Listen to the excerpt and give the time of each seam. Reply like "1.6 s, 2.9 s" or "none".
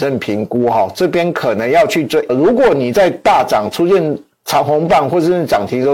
2.3 s